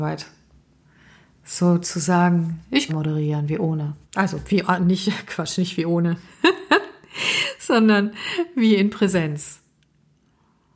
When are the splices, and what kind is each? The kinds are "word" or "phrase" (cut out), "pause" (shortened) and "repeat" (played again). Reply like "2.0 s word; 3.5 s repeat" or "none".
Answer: 2.9 s phrase; 4.0 s pause